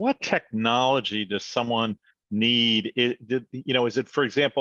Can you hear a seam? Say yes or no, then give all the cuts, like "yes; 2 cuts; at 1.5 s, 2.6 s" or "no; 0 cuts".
no; 0 cuts